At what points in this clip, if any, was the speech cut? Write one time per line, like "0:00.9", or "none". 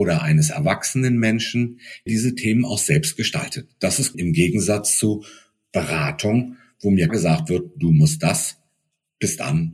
0:02.1
0:04.1
0:07.1